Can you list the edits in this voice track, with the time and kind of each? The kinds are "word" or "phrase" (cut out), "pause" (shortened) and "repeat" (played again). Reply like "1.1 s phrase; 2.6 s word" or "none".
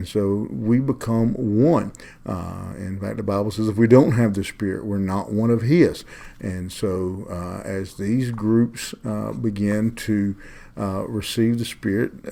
none